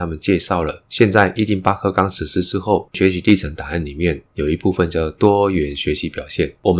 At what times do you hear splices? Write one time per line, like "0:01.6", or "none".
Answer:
0:04.3

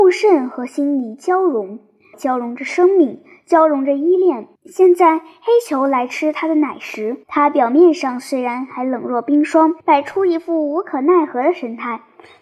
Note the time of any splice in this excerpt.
0:02.1
0:04.6
0:07.2
0:09.8

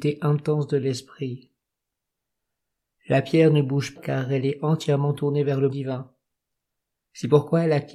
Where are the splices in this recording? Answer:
0:04.0
0:05.7

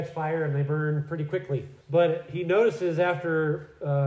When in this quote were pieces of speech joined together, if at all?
0:01.8

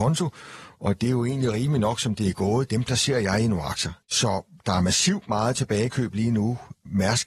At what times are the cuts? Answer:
0:04.0

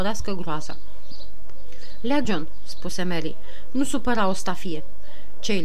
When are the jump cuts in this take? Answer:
0:02.2

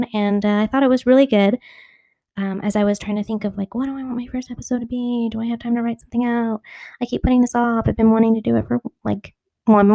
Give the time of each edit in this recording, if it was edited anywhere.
none

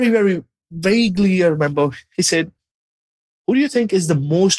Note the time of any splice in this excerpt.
none

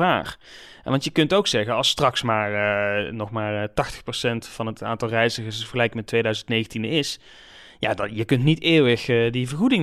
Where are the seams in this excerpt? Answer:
none

